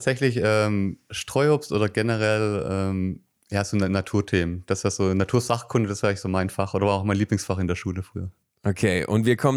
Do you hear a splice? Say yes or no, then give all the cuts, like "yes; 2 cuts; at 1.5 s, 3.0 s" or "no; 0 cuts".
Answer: no; 0 cuts